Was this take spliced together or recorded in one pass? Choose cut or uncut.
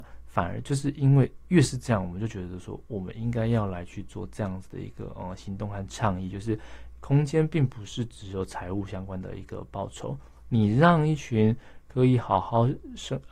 uncut